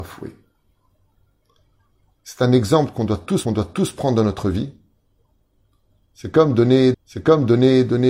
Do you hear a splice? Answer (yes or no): yes